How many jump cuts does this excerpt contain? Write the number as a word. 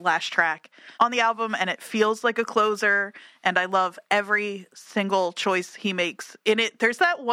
one